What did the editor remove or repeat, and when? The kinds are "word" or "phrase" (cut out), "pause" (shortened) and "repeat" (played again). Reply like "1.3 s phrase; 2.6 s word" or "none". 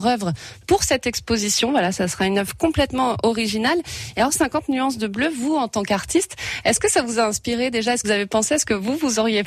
8.0 s word